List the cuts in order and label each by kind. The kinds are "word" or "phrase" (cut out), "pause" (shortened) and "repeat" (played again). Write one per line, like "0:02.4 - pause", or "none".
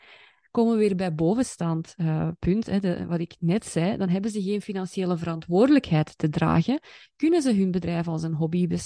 none